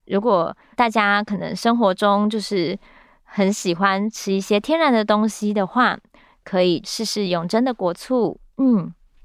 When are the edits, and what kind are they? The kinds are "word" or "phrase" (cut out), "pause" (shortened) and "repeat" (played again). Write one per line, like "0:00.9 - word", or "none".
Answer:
none